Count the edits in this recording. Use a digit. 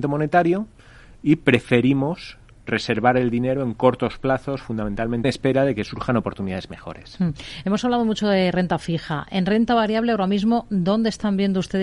2